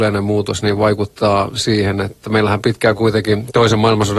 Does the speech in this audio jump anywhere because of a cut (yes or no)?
no